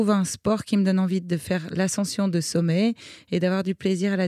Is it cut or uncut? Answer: uncut